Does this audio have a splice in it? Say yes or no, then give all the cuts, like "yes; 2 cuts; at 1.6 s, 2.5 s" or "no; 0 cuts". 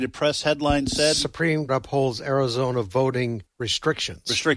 yes; 2 cuts; at 1.7 s, 3.5 s